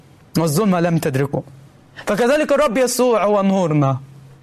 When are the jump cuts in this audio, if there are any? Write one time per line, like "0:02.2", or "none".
none